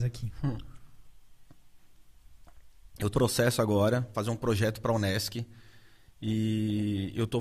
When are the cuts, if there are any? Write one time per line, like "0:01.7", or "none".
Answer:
0:03.1
0:04.1